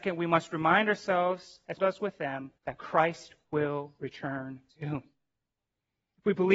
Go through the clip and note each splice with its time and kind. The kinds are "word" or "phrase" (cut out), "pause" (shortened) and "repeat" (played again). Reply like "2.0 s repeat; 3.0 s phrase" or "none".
1.8 s word; 2.6 s pause; 4.7 s pause